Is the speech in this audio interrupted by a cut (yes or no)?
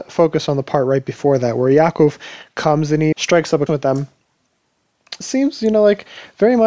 yes